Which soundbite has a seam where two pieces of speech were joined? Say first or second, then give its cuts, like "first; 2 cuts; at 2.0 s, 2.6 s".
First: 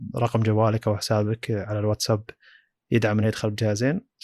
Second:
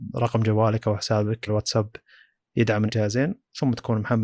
second; 2 cuts; at 1.5 s, 2.9 s